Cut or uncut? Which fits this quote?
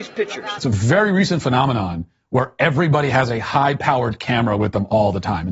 uncut